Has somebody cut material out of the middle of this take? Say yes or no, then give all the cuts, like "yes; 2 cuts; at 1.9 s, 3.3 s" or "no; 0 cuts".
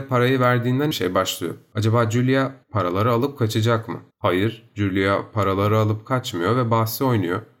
yes; 3 cuts; at 0.9 s, 2.6 s, 4.1 s